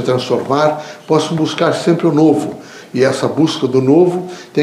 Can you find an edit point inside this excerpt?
no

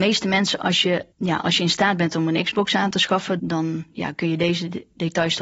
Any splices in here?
yes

